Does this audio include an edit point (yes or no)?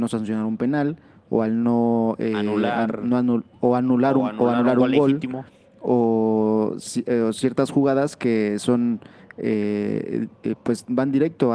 no